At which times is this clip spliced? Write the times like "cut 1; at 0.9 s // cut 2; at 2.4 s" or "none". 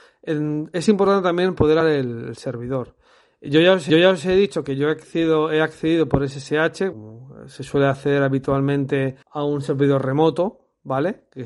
cut 1; at 1.8 s // cut 2; at 3.9 s // cut 3; at 6.9 s // cut 4; at 9.2 s